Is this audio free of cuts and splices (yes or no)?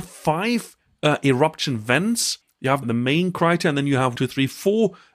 no